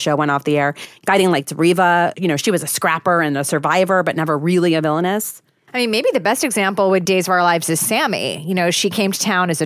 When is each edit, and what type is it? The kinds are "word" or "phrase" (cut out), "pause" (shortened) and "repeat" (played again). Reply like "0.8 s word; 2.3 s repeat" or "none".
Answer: 7.1 s word